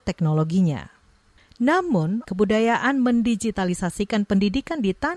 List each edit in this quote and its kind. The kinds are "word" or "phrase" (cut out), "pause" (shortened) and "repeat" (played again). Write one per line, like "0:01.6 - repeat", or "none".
0:02.2 - phrase